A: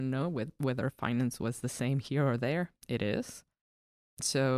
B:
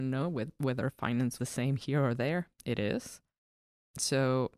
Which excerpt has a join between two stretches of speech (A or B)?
B